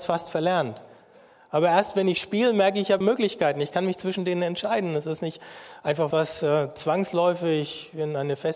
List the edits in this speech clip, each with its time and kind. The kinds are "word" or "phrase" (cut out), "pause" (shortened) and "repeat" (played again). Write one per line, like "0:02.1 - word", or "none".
0:03.0 - word
0:06.1 - word